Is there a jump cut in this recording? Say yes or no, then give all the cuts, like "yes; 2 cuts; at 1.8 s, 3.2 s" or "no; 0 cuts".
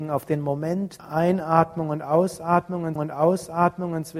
yes; 2 cuts; at 1.0 s, 3.0 s